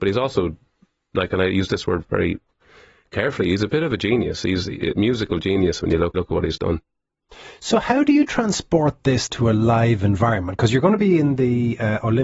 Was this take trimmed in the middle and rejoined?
yes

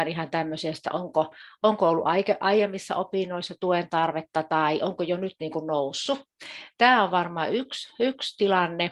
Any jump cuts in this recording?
no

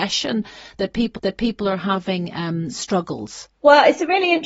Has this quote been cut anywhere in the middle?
yes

